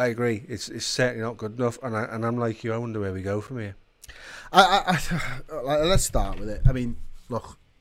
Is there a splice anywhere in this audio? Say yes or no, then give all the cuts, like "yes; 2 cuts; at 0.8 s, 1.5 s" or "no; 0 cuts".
no; 0 cuts